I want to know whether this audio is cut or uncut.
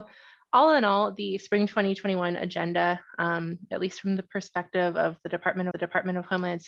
cut